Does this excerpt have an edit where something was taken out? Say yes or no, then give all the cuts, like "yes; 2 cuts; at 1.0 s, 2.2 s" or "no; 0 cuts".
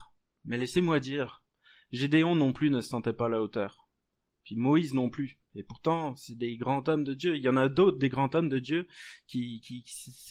no; 0 cuts